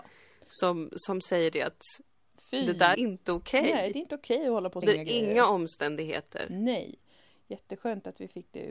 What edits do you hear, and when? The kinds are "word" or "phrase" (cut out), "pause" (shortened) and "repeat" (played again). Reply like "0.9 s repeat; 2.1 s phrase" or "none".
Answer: 2.9 s word; 4.8 s word